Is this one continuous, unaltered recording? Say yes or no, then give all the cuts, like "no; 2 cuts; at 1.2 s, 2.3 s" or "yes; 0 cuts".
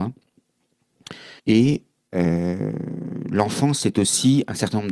no; 1 cut; at 1.4 s